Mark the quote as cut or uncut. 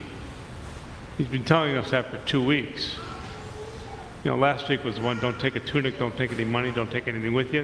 uncut